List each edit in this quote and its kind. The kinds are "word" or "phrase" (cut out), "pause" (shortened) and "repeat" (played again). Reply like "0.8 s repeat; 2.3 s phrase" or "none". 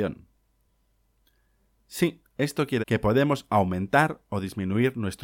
2.8 s word